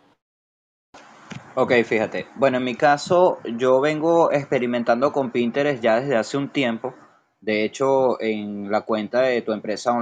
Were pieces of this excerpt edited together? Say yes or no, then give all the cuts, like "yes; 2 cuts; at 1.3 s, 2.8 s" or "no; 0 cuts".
no; 0 cuts